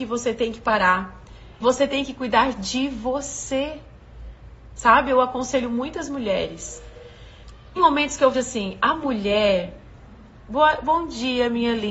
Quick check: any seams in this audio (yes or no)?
yes